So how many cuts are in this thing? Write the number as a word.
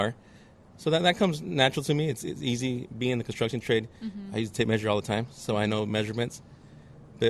zero